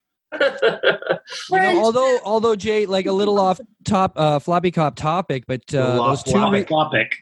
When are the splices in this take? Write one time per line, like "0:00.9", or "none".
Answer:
none